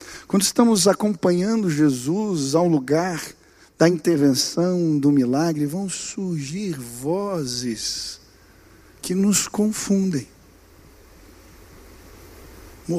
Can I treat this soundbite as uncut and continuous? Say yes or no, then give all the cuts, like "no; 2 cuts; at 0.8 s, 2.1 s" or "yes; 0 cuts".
yes; 0 cuts